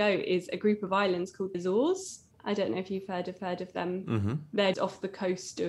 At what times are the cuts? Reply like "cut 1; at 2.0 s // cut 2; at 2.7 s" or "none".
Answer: cut 1; at 1.5 s // cut 2; at 3.4 s // cut 3; at 4.7 s